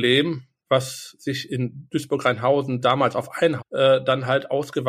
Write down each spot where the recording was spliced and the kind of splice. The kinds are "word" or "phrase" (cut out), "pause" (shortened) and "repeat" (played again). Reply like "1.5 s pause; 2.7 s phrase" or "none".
3.6 s phrase